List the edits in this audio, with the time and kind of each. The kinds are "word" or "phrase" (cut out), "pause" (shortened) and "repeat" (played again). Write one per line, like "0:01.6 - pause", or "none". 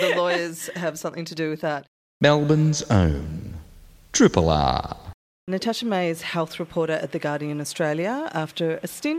none

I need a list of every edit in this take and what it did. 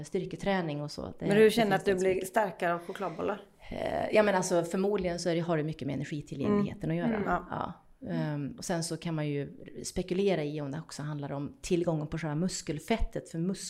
none

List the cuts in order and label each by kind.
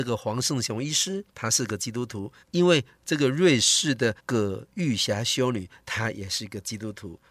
0:01.3 - pause
0:02.4 - pause
0:04.2 - pause

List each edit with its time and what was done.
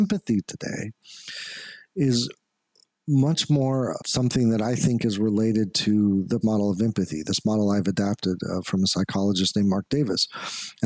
0:04.0 - word
0:06.4 - word

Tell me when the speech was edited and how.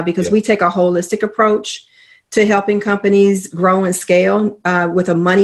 none

